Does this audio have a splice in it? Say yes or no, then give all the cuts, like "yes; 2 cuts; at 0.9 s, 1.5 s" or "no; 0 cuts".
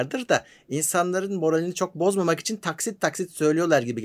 no; 0 cuts